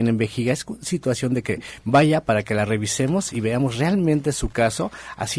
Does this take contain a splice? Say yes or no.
no